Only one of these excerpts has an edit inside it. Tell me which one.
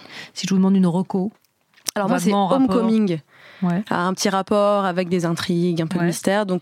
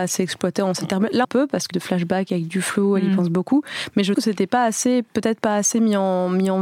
second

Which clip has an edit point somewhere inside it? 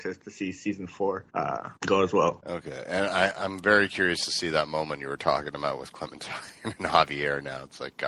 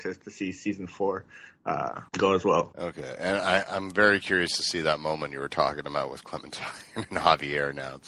first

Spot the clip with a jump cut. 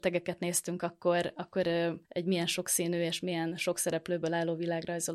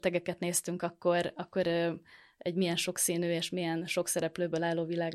first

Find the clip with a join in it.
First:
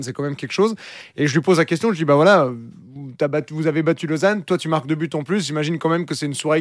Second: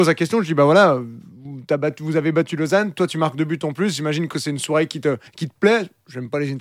second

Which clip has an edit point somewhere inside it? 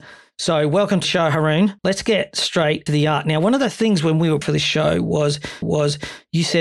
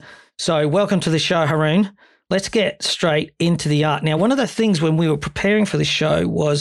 first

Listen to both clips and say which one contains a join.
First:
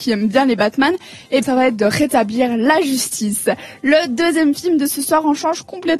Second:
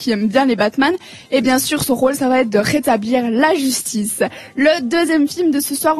first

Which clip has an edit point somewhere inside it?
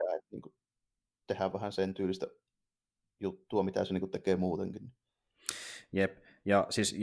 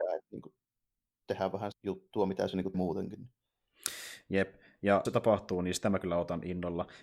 second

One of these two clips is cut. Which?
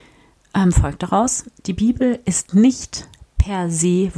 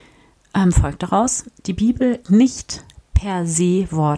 second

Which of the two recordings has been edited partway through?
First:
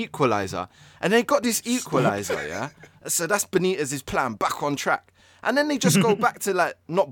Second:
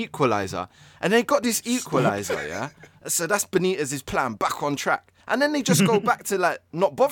second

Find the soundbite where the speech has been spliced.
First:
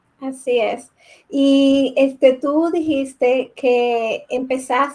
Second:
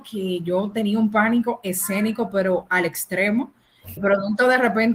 second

